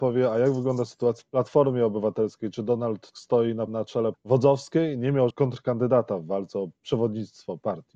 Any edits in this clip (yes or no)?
yes